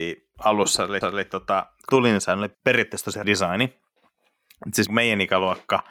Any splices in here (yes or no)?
yes